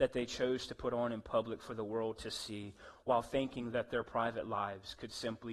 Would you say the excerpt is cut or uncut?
uncut